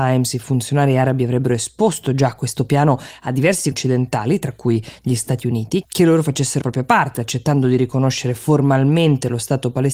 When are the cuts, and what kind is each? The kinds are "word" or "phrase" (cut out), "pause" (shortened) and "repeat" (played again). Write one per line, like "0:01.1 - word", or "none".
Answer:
0:03.7 - word
0:05.8 - word
0:06.6 - word